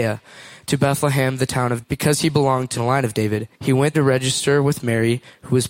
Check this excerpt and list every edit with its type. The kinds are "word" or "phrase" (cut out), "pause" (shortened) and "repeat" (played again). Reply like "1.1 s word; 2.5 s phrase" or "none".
1.8 s word; 2.8 s phrase; 3.5 s pause; 3.9 s word